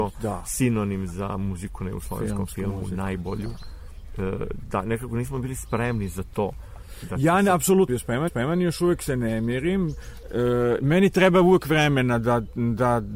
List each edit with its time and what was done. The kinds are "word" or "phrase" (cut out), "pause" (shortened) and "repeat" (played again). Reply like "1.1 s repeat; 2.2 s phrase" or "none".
7.9 s word; 8.3 s repeat